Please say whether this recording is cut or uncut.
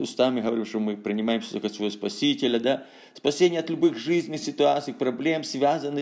uncut